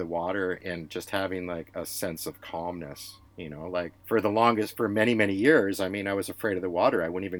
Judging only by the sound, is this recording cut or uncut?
cut